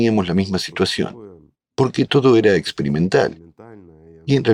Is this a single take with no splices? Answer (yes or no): no